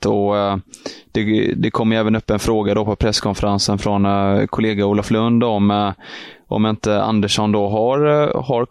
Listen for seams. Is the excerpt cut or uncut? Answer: uncut